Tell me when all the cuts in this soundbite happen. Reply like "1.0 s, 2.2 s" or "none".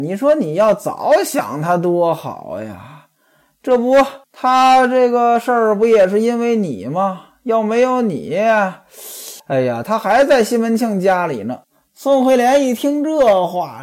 4.2 s, 9.4 s, 11.6 s